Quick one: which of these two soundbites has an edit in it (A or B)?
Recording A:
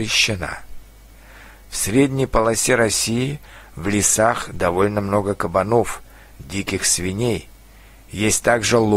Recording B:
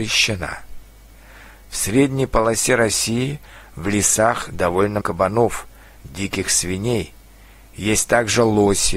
B